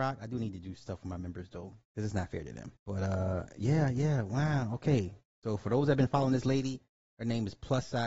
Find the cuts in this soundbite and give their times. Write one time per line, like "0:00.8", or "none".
0:02.8

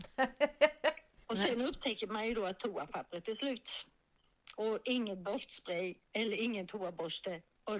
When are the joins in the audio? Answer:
0:01.2
0:06.0

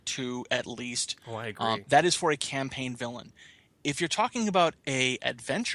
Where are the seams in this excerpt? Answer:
none

